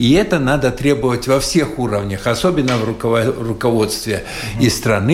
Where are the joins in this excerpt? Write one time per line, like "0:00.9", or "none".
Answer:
none